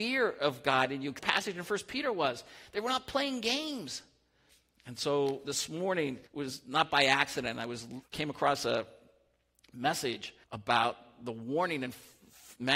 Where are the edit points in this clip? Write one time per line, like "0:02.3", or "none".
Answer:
0:01.2
0:04.5
0:06.3
0:08.0
0:10.4

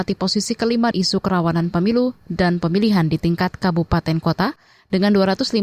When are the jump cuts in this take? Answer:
0:00.9

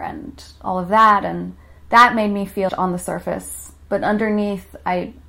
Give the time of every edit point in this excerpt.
0:01.8
0:02.7

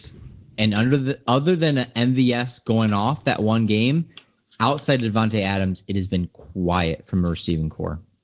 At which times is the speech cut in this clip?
none

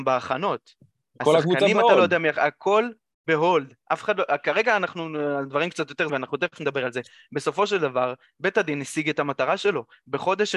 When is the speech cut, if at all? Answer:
0:06.1

